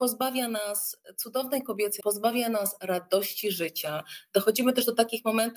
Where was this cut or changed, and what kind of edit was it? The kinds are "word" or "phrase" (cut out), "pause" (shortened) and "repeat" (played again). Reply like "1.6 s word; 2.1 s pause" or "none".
2.0 s word